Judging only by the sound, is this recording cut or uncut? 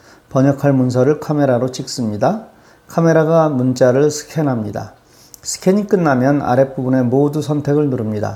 uncut